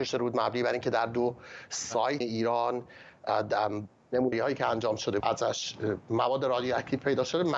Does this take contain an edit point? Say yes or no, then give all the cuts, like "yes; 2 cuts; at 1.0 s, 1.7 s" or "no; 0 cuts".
yes; 3 cuts; at 2.2 s, 4.3 s, 5.2 s